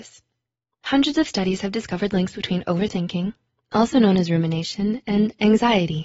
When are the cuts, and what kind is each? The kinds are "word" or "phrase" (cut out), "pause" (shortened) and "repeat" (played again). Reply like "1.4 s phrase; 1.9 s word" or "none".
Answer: none

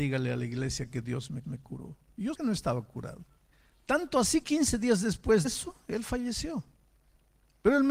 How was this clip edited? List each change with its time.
1.4 s repeat; 2.3 s word; 3.5 s pause; 4.4 s word; 5.4 s word

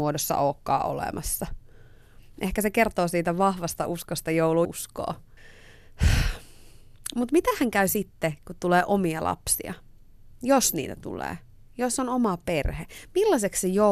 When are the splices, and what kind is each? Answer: 4.6 s phrase

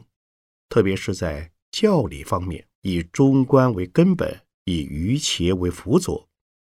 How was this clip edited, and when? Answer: 2.7 s pause; 4.5 s pause

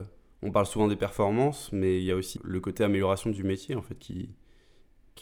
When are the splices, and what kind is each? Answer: 2.4 s word

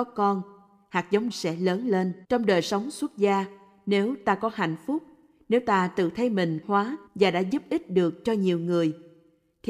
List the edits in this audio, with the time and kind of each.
1.3 s word; 2.2 s pause; 6.6 s phrase; 7.1 s pause

